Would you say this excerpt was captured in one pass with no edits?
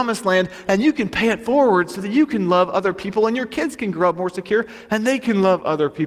yes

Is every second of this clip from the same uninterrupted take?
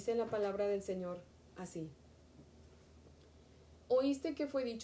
yes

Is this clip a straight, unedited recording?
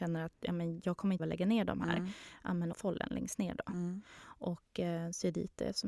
no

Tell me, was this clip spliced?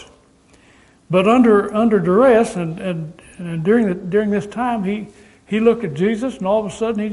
no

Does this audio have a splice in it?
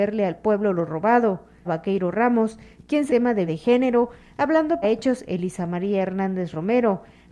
yes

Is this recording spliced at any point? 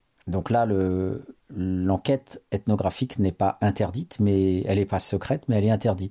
yes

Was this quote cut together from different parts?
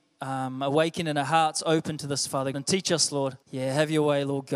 yes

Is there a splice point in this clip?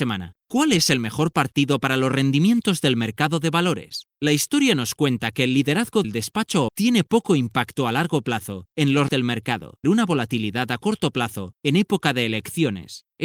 yes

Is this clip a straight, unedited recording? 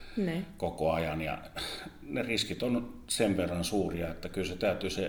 yes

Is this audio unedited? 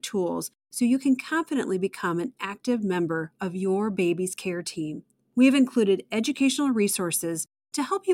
yes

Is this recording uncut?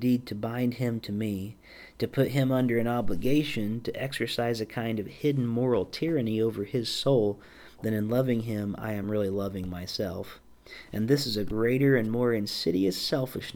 yes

